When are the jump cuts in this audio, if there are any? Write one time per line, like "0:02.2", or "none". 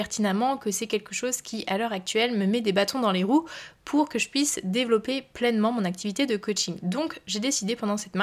none